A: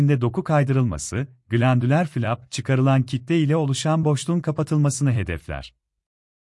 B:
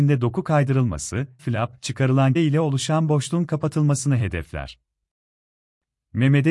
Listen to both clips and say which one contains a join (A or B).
B